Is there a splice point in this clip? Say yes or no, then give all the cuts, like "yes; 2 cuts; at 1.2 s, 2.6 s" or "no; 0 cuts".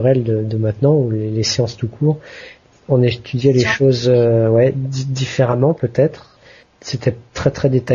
no; 0 cuts